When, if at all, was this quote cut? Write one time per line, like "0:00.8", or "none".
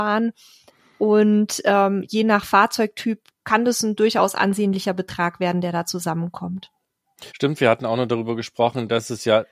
0:03.3
0:07.3